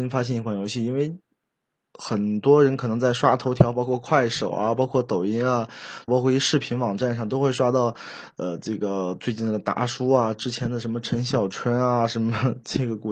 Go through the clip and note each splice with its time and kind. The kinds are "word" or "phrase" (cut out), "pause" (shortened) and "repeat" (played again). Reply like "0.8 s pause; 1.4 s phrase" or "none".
6.1 s phrase